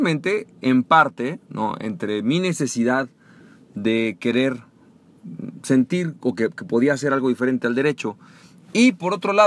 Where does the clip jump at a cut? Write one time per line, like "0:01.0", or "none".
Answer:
none